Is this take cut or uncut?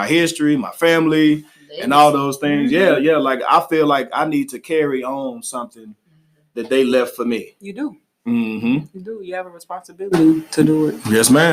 uncut